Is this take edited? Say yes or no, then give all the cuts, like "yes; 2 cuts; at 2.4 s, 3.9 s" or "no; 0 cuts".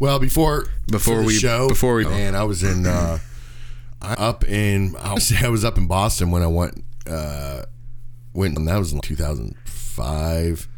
yes; 5 cuts; at 2.0 s, 4.1 s, 5.2 s, 8.6 s, 9.0 s